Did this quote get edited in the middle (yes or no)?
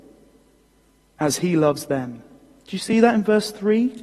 no